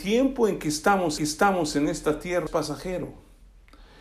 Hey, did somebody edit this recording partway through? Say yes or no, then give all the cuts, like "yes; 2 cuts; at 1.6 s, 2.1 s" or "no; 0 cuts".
yes; 2 cuts; at 1.2 s, 2.5 s